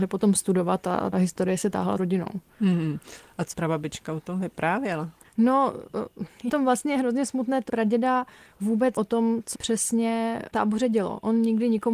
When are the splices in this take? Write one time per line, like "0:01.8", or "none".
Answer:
0:01.1
0:02.0
0:03.5
0:06.5
0:07.7
0:09.0
0:09.5
0:10.5